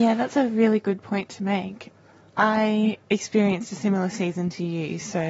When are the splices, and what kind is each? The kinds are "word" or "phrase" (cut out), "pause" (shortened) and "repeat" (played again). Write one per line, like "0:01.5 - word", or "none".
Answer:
none